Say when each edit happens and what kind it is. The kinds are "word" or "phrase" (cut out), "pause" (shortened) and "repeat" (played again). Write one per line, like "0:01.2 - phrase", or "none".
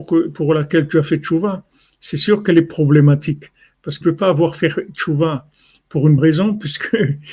0:04.0 - word
0:06.2 - word